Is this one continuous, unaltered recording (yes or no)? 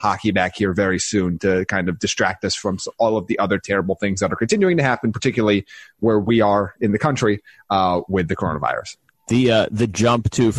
yes